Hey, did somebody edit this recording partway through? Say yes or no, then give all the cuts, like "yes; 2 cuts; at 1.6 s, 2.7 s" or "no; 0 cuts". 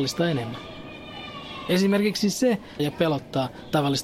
yes; 1 cut; at 2.8 s